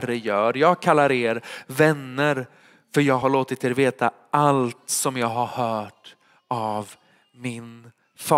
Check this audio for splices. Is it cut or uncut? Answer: uncut